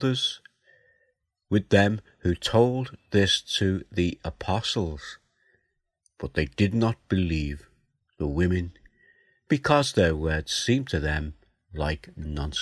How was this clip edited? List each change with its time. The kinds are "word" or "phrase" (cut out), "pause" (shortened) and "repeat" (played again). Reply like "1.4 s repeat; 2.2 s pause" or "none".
none